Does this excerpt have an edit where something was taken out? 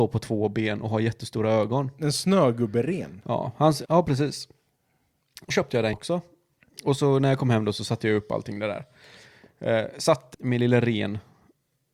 yes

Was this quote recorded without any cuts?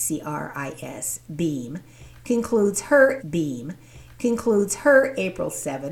no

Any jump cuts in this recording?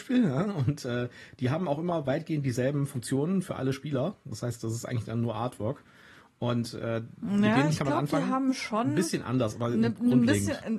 no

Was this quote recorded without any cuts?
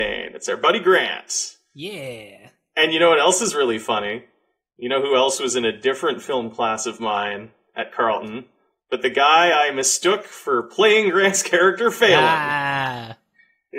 yes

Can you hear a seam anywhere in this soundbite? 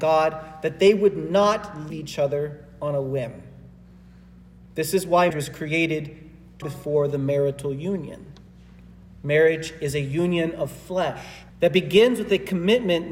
yes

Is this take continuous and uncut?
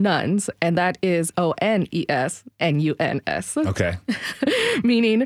no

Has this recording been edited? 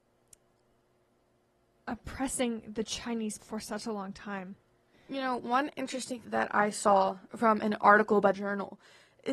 yes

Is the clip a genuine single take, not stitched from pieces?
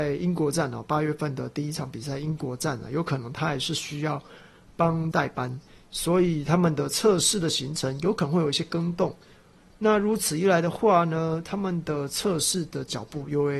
no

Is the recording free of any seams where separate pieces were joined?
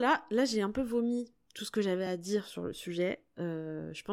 yes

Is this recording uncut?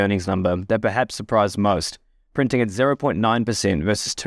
yes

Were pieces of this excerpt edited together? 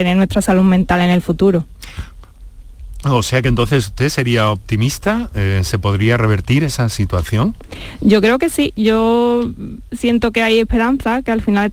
no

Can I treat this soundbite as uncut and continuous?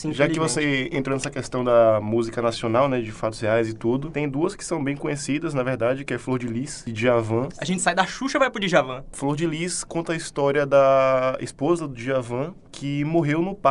yes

